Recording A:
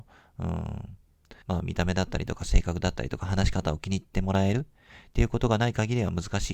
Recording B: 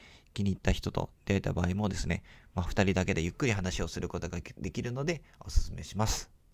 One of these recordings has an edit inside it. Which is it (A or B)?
A